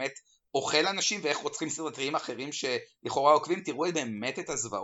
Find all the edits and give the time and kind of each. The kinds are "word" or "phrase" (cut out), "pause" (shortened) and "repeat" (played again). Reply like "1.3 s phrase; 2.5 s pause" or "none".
none

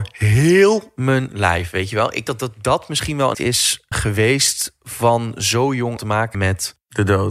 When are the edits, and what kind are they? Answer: 2.3 s word; 3.3 s word; 3.9 s word; 6.0 s word; 6.3 s word

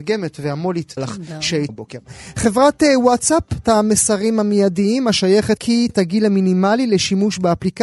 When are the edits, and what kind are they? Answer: 1.0 s phrase; 1.7 s word; 3.6 s word; 5.6 s phrase; 5.9 s word

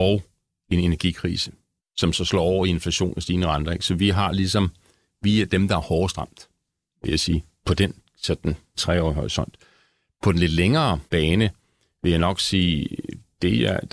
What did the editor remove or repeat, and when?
1.8 s pause; 8.7 s word; 11.1 s pause

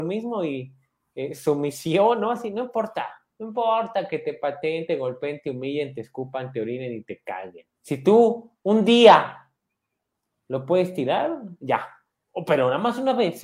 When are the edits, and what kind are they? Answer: 3.3 s pause; 7.7 s pause

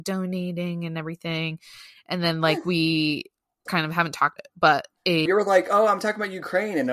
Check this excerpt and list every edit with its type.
3.7 s word; 4.4 s word; 5.3 s word

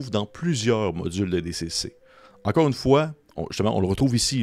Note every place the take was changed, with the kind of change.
3.2 s pause

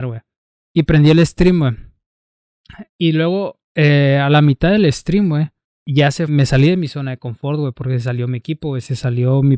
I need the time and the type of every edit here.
2.9 s pause; 3.6 s pause; 5.6 s pause; 6.3 s phrase

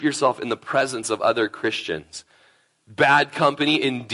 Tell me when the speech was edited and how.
none

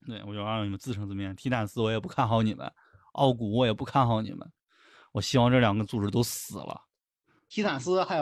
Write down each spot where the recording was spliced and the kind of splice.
none

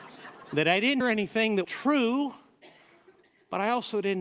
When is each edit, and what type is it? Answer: 1.0 s word; 1.6 s word

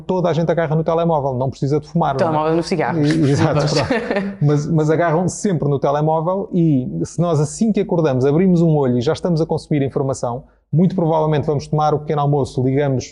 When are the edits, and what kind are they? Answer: none

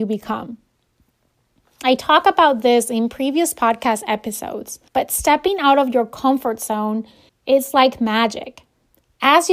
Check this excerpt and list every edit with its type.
4.9 s pause; 7.3 s pause

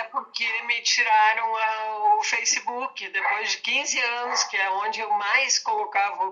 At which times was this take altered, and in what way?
none

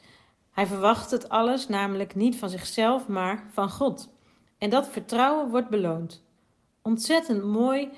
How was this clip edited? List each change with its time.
none

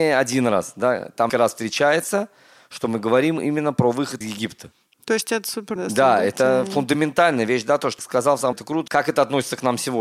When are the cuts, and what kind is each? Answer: 1.3 s word; 4.2 s word; 5.8 s word; 8.0 s word; 8.5 s word; 8.9 s word

